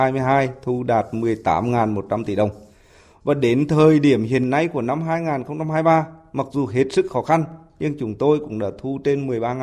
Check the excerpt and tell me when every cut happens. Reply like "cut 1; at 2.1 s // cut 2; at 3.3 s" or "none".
none